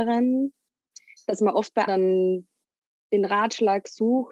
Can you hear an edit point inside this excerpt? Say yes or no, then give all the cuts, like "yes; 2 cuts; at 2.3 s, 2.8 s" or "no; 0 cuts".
yes; 1 cut; at 1.9 s